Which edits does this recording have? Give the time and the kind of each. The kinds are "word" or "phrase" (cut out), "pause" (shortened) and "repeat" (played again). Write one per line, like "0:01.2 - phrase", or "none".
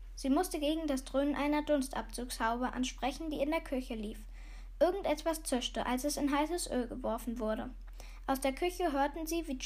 none